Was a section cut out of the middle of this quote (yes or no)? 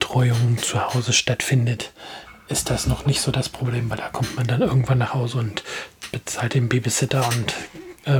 no